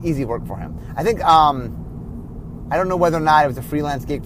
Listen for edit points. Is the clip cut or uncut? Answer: uncut